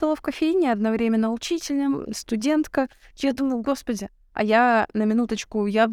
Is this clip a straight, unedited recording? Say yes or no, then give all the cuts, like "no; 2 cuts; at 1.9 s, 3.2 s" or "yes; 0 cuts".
yes; 0 cuts